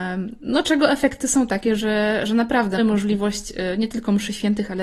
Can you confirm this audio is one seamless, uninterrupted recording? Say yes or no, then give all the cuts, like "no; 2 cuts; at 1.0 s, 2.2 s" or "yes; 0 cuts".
no; 1 cut; at 2.8 s